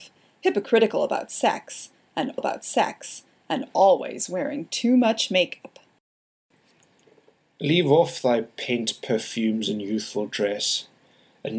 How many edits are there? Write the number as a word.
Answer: one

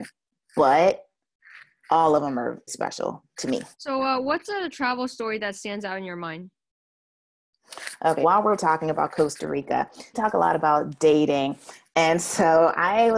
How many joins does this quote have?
four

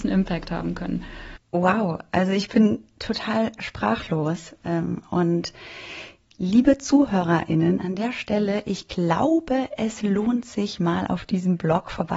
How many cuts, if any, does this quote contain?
zero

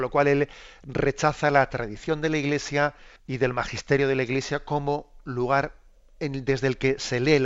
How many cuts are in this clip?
one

